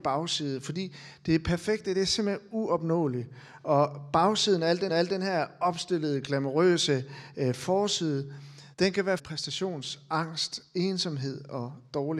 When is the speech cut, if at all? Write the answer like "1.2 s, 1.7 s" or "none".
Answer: 4.9 s, 8.7 s, 9.2 s